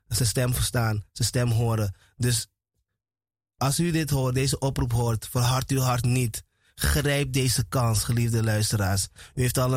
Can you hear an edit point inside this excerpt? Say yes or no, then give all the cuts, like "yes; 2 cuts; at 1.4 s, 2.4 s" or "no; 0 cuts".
no; 0 cuts